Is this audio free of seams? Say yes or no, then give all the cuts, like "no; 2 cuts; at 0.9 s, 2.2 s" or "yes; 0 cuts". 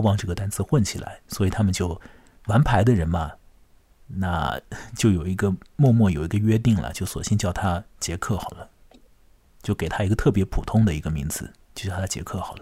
no; 1 cut; at 2.4 s